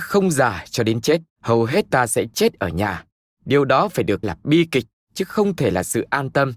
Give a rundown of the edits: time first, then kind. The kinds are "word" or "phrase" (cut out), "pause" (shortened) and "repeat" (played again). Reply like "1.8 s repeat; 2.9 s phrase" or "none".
1.3 s pause; 1.9 s word; 4.2 s word